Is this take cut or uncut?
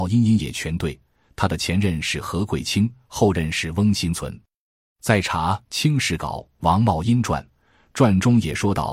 uncut